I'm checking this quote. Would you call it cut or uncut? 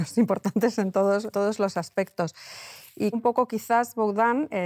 cut